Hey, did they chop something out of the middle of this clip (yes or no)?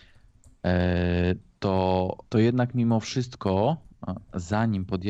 yes